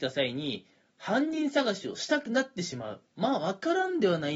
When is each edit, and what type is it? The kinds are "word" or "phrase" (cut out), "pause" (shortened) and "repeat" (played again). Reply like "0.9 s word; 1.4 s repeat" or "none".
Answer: 3.1 s pause